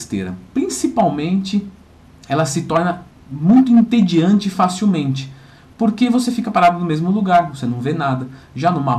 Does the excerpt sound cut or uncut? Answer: uncut